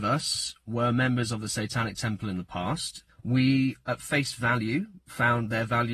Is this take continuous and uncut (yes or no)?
no